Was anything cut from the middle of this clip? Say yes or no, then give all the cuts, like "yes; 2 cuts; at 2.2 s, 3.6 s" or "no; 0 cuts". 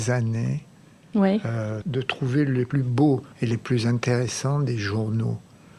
yes; 2 cuts; at 1.8 s, 3.3 s